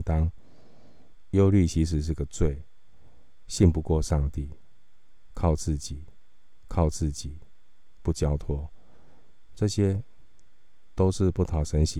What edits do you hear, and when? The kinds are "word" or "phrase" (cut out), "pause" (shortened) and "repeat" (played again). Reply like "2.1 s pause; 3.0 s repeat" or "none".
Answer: 6.6 s repeat